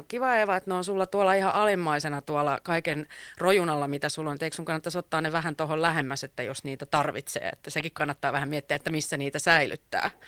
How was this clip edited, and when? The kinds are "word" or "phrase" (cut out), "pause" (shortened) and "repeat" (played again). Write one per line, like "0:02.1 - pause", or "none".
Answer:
none